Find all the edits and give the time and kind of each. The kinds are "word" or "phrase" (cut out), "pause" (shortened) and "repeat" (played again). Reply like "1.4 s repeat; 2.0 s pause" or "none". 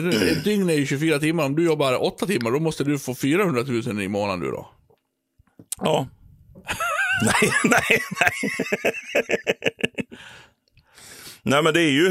5.7 s pause

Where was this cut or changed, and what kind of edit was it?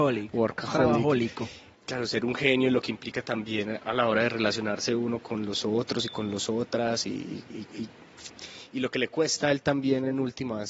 none

